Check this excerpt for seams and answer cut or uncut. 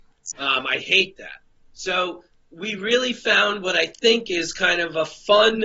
uncut